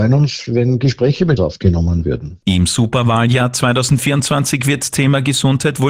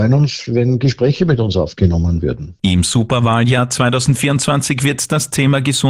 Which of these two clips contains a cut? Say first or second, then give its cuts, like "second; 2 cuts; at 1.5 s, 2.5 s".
first; 2 cuts; at 1.4 s, 4.9 s